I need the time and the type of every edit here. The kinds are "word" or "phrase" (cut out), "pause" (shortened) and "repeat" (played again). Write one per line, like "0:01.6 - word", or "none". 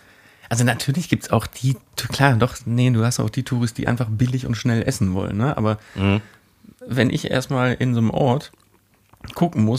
none